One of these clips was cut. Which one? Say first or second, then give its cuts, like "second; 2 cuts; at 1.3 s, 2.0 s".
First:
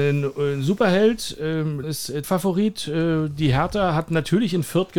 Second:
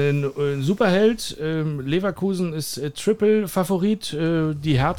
first; 2 cuts; at 1.8 s, 2.2 s